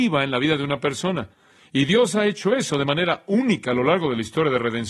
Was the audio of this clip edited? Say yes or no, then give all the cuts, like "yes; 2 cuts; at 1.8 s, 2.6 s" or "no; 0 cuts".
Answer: no; 0 cuts